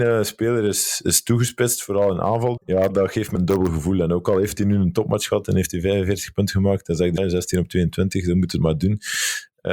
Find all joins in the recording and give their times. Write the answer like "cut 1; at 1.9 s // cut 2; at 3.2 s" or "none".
cut 1; at 2.6 s // cut 2; at 2.9 s // cut 3; at 3.4 s // cut 4; at 7.2 s